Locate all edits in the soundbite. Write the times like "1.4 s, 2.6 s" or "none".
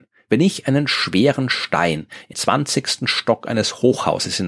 2.3 s